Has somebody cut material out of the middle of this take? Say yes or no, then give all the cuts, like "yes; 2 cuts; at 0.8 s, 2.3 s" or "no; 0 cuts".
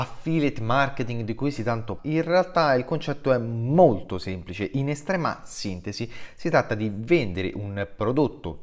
yes; 1 cut; at 2.0 s